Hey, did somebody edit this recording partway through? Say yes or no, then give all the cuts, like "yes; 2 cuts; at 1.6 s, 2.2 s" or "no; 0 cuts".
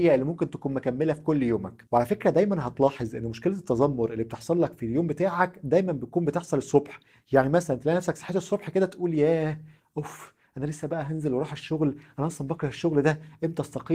no; 0 cuts